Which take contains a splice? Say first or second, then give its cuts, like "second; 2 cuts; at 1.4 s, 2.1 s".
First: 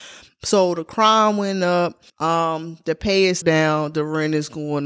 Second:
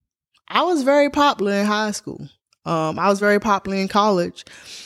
first; 2 cuts; at 2.1 s, 3.4 s